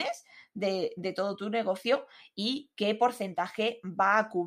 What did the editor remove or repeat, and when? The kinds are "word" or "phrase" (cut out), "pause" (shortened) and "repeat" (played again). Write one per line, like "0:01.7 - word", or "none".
none